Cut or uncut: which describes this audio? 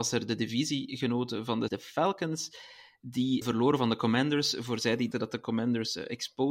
cut